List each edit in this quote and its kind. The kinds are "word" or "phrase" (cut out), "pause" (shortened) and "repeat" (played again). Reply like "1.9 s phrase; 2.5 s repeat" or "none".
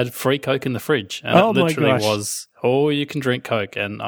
none